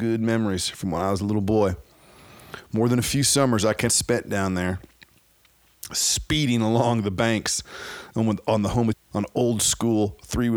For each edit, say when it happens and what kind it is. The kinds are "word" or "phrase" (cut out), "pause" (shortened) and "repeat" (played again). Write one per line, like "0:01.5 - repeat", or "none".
0:03.9 - phrase
0:08.9 - word